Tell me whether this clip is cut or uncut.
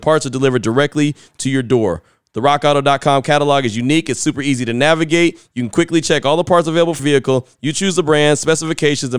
cut